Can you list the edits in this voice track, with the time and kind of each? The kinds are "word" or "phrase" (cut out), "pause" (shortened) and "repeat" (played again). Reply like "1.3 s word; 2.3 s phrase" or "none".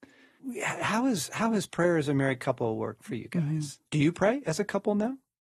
3.0 s word; 3.9 s pause